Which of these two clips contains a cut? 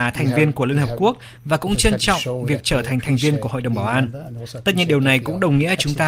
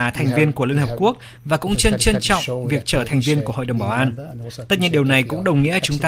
second; 2 cuts; at 2.0 s, 3.1 s

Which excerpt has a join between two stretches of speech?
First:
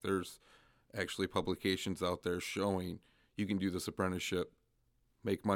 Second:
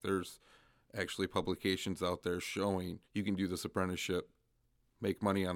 second; 1 cut; at 3.0 s

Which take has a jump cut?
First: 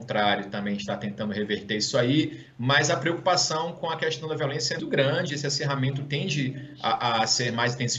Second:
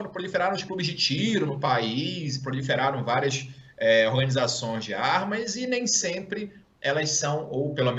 first; 1 cut; at 4.8 s

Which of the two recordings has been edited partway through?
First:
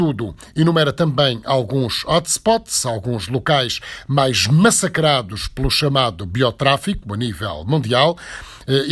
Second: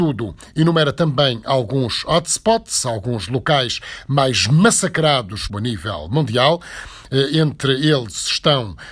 second; 1 cut; at 5.5 s

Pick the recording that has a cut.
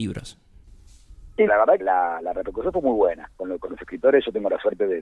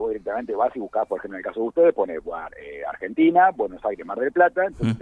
first; 2 cuts; at 1.5 s, 1.8 s

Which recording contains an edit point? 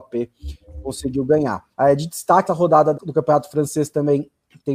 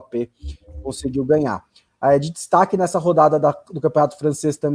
first; 3 cuts; at 1.7 s, 2.5 s, 2.9 s

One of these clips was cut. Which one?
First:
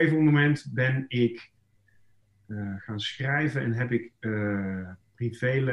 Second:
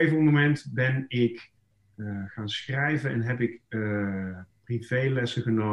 second; 1 cut; at 1.7 s

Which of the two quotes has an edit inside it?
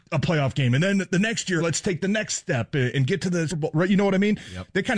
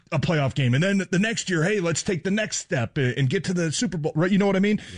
first; 2 cuts; at 1.6 s, 3.5 s

